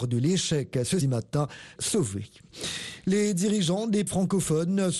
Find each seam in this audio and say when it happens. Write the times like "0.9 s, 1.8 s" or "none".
1.0 s, 1.8 s, 4.1 s